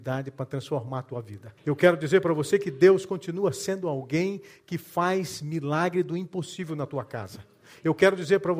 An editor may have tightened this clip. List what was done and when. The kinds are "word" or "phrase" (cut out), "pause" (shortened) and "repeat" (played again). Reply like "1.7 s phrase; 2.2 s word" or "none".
1.6 s pause

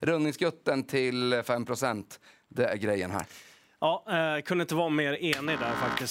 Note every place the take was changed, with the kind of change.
none

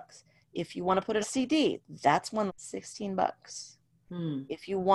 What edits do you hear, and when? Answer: 1.2 s word; 2.5 s word

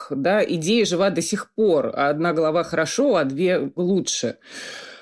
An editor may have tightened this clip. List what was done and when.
3.8 s word

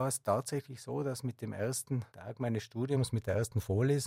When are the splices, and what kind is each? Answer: 2.1 s pause

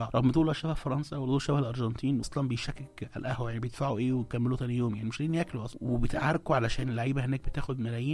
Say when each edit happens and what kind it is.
2.2 s word

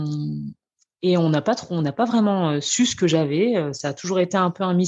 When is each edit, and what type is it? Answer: none

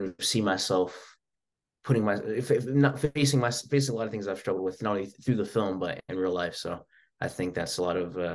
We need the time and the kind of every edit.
none

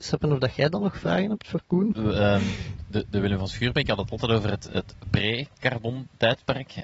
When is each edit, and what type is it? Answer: none

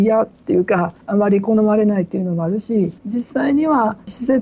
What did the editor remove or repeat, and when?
3.0 s pause

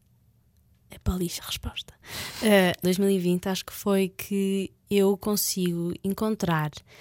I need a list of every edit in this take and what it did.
1.4 s word; 2.8 s phrase; 4.8 s pause

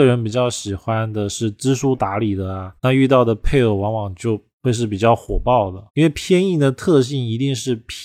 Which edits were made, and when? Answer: 2.8 s pause; 4.5 s pause; 5.9 s pause

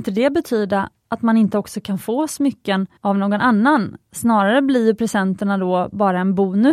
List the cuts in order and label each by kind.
3.0 s pause

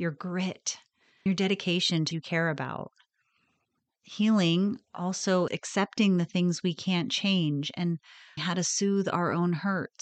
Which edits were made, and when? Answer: 1.3 s word; 2.1 s word; 5.5 s word; 8.4 s word

